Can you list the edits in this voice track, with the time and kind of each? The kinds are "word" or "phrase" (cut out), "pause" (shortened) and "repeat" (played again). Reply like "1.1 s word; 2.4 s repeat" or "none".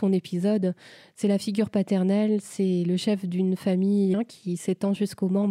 4.1 s word